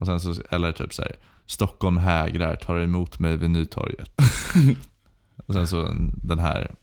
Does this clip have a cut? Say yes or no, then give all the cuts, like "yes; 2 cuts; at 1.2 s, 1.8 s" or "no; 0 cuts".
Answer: no; 0 cuts